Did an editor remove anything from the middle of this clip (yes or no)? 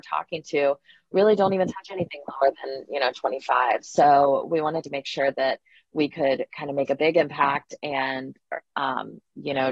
no